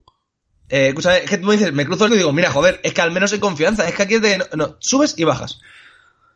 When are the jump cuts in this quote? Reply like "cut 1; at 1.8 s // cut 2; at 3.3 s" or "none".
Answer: cut 1; at 2.1 s